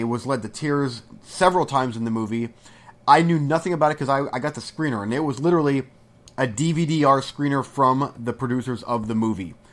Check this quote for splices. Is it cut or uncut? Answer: uncut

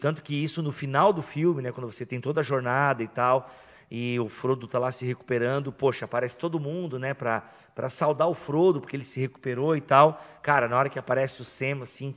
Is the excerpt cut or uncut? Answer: uncut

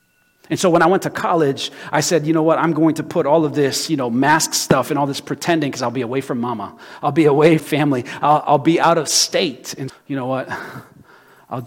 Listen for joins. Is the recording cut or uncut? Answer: cut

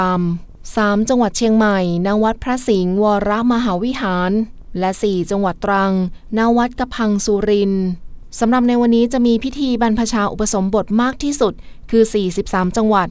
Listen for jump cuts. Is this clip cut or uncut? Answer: uncut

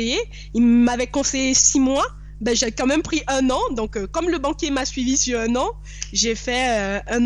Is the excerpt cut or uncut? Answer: uncut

